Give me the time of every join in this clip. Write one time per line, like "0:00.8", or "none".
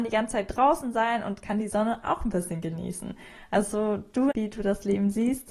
0:04.3